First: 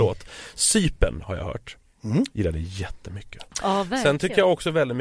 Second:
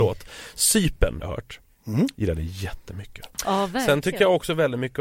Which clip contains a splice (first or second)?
second